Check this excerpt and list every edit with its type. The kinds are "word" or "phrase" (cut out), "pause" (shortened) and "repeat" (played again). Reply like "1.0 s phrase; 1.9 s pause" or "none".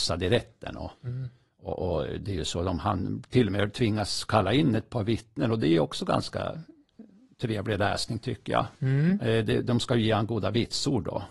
0.9 s pause; 8.7 s pause